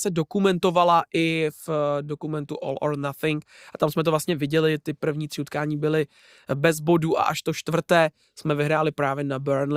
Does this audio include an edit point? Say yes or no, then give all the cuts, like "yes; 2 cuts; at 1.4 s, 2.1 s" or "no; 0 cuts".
no; 0 cuts